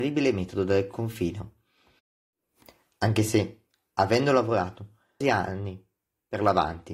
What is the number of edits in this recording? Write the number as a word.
one